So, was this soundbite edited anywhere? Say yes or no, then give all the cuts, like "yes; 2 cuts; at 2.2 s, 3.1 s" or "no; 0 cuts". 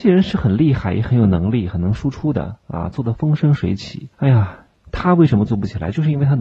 yes; 1 cut; at 4.1 s